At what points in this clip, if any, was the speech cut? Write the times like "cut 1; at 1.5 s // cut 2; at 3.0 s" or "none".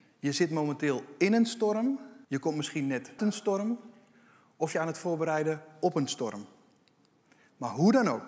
cut 1; at 2.2 s // cut 2; at 3.2 s // cut 3; at 4.7 s